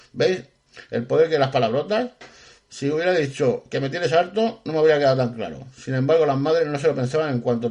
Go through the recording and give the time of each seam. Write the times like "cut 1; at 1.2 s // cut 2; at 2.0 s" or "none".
none